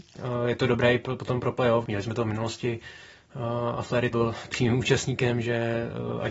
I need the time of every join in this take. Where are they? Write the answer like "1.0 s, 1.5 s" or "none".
4.1 s

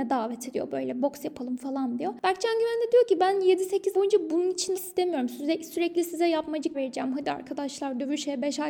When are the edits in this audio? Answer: 3.9 s, 4.7 s, 6.7 s

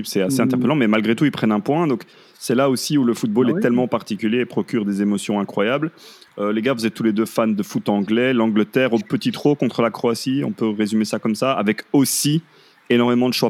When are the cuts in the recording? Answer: none

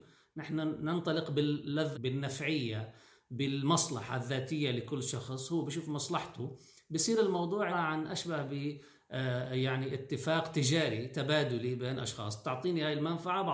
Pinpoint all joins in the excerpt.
1.9 s, 7.7 s

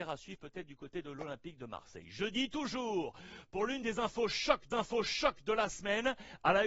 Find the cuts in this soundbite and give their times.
4.7 s

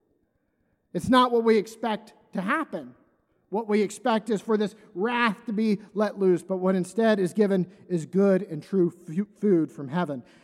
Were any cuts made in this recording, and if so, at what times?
none

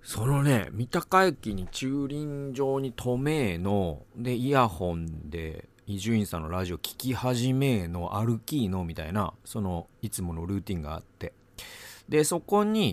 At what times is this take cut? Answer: 4.1 s, 5.8 s

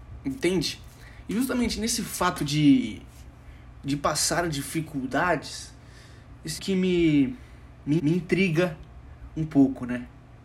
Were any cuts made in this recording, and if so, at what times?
6.6 s, 8.0 s

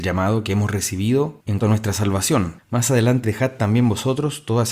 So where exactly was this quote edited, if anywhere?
1.6 s, 3.2 s

